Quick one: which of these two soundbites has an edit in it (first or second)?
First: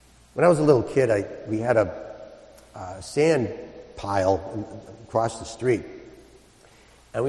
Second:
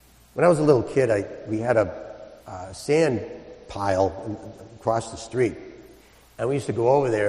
second